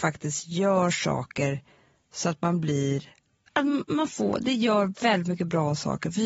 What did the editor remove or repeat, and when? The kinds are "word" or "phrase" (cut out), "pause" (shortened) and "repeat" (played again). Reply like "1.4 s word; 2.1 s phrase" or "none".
none